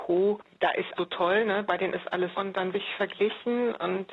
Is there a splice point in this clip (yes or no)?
yes